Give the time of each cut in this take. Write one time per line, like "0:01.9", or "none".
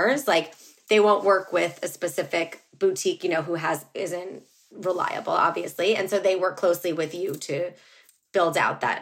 none

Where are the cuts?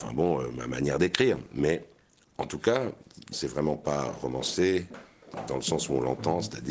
0:03.3

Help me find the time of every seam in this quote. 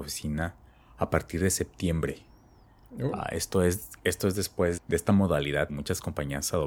0:04.8
0:05.7

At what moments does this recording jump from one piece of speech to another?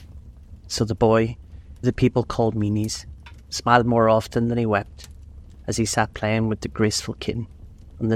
0:01.8

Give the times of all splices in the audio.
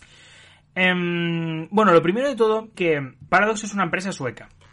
0:02.7
0:03.3

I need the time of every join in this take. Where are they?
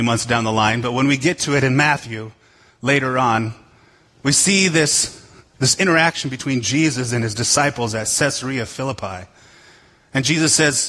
none

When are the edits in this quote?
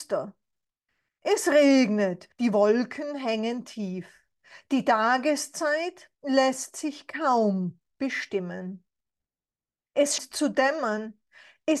0:02.3
0:06.1
0:10.2

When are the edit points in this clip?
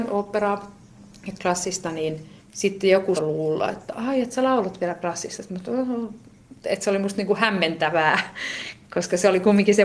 0:02.4
0:03.2

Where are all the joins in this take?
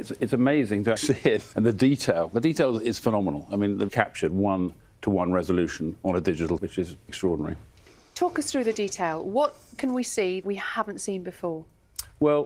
0:01.0
0:01.5
0:03.9
0:06.6
0:07.1
0:10.4

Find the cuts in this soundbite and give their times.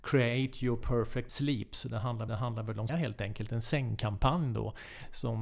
0:01.3
0:02.3
0:02.9

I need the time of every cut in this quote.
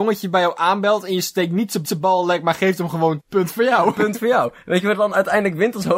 0:01.8
0:03.2

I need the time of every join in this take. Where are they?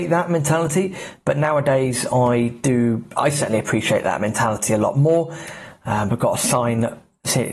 none

